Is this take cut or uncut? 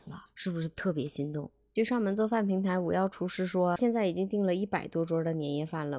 uncut